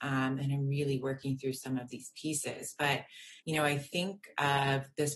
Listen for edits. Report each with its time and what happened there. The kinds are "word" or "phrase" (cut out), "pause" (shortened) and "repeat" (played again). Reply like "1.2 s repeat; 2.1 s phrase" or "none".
3.4 s pause